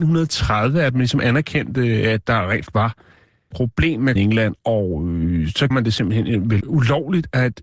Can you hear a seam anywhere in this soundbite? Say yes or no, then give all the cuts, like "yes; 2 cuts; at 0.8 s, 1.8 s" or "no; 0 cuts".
yes; 6 cuts; at 2.3 s, 2.7 s, 3.5 s, 4.2 s, 5.7 s, 6.6 s